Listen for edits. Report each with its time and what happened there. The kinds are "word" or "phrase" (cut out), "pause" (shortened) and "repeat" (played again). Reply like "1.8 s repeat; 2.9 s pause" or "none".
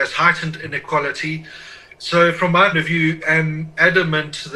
2.7 s word; 3.2 s word